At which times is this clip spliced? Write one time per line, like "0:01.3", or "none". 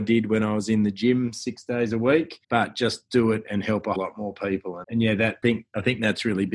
0:02.4
0:04.0
0:04.8
0:05.4